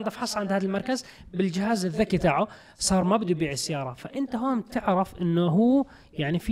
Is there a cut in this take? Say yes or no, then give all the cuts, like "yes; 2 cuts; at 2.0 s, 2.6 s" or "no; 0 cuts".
no; 0 cuts